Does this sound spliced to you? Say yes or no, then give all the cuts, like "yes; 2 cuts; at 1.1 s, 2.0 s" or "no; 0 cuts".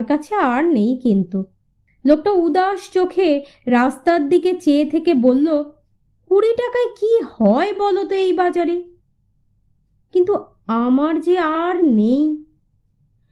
no; 0 cuts